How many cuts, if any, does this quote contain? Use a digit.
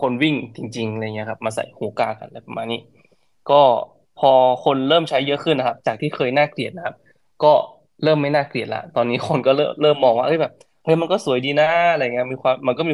0